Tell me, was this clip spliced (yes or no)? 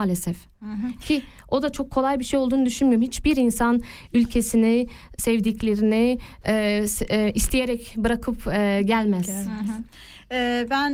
yes